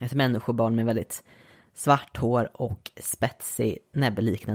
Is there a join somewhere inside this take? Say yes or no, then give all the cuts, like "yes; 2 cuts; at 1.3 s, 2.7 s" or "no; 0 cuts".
no; 0 cuts